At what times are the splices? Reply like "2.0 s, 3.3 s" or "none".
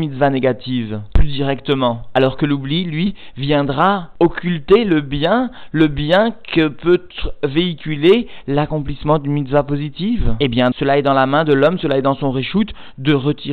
10.7 s

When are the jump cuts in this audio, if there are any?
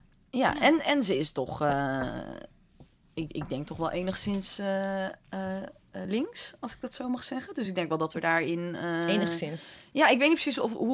none

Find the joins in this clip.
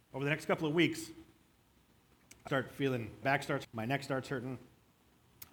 2.5 s, 3.2 s, 3.6 s

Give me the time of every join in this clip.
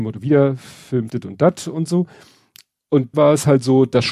1.1 s, 3.1 s

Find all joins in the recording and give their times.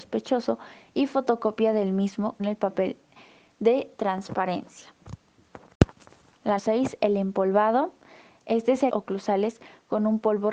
2.4 s, 6.6 s, 8.9 s

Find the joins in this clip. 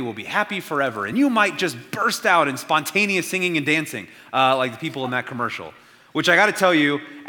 none

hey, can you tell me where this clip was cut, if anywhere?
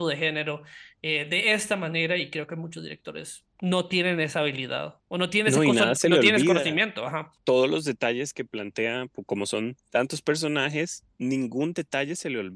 5.0 s

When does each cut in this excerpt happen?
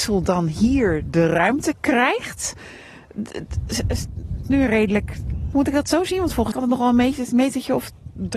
4.4 s, 5.5 s, 6.5 s

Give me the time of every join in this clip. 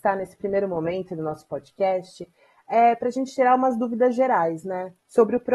none

